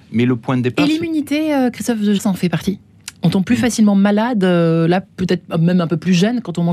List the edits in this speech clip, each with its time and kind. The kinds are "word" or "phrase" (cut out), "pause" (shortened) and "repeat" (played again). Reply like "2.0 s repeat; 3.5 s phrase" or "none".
2.2 s word